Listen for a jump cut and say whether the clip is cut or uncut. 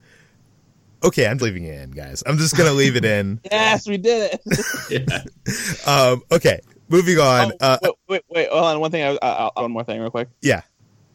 cut